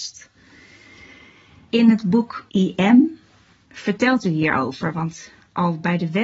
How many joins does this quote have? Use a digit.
1